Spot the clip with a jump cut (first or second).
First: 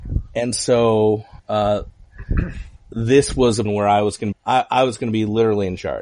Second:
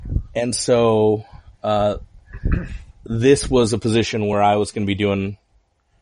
first